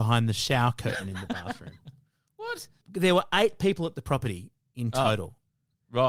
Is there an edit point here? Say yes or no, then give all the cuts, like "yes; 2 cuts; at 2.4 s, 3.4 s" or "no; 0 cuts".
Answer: no; 0 cuts